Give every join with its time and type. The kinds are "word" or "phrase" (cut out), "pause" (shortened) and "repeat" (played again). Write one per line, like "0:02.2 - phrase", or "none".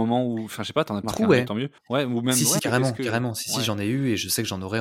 0:01.0 - phrase
0:01.8 - pause
0:02.6 - word